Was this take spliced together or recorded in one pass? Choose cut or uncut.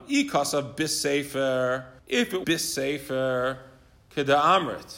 cut